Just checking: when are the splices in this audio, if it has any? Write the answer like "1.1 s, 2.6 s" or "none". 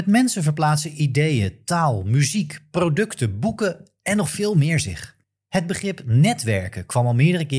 5.2 s